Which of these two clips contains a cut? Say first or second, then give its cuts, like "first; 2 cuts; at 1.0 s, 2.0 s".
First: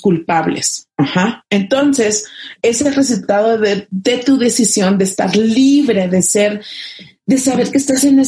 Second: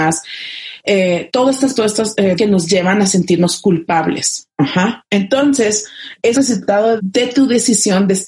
second; 4 cuts; at 1.7 s, 2.4 s, 6.3 s, 7.0 s